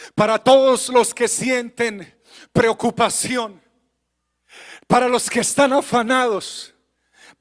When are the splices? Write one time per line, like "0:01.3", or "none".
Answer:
none